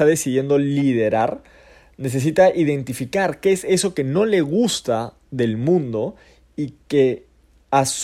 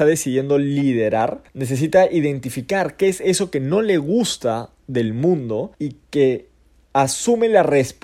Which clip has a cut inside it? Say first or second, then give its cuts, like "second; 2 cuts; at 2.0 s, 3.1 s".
second; 2 cuts; at 1.5 s, 5.7 s